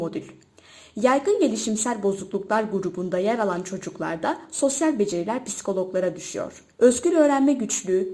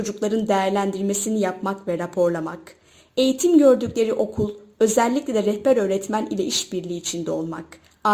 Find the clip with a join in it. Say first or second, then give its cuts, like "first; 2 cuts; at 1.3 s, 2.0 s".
first; 1 cut; at 6.7 s